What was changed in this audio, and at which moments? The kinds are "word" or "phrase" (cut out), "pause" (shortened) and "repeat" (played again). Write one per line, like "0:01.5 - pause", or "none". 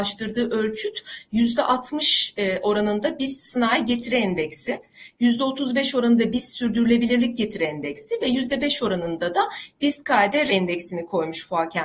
0:10.5 - word